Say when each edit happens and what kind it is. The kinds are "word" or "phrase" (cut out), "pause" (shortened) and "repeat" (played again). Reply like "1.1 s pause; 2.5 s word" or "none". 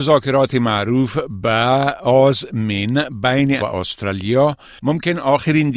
3.6 s word